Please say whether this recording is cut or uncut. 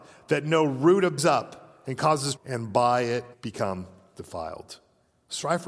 cut